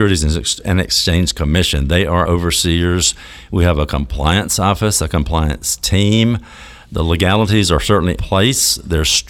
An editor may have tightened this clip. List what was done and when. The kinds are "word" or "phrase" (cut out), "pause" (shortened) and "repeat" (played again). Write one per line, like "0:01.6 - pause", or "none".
0:02.2 - word
0:08.2 - word